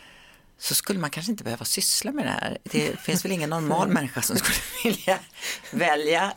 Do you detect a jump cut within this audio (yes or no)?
no